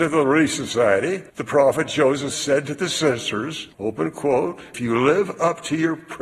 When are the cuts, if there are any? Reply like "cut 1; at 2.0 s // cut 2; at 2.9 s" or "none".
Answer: cut 1; at 1.3 s // cut 2; at 2.3 s // cut 3; at 3.7 s // cut 4; at 4.7 s